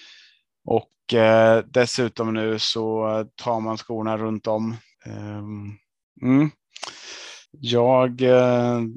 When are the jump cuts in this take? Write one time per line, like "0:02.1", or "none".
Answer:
0:04.9
0:07.5